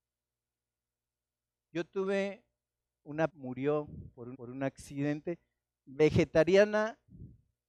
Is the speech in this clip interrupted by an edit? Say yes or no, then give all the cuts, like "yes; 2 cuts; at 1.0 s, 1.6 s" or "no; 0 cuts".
yes; 2 cuts; at 3.3 s, 4.3 s